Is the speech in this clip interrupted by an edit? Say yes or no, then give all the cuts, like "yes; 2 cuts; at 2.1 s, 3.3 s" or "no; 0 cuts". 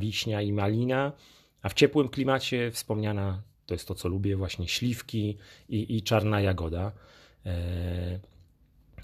no; 0 cuts